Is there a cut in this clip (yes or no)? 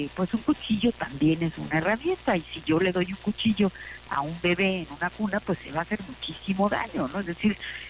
no